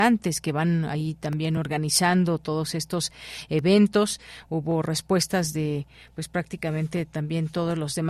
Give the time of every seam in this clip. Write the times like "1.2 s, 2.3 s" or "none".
none